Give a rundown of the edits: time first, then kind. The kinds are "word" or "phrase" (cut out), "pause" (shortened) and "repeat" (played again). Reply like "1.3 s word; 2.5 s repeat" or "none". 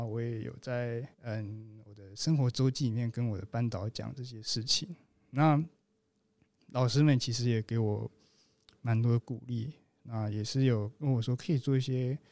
1.1 s pause